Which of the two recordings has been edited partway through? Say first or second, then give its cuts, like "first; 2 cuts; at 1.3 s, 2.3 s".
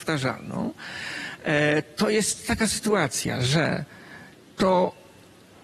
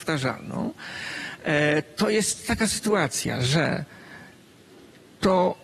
first; 1 cut; at 4.3 s